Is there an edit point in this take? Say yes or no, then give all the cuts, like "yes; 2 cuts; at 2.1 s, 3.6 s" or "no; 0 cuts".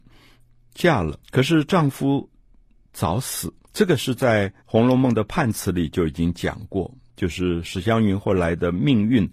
yes; 3 cuts; at 1.2 s, 3.6 s, 4.6 s